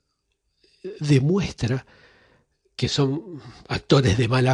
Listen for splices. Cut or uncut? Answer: uncut